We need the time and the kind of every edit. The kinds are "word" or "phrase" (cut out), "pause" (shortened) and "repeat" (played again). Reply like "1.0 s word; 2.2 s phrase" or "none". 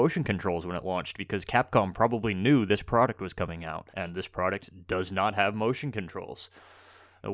3.9 s pause